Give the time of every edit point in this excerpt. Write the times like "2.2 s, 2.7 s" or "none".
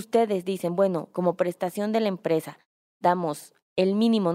none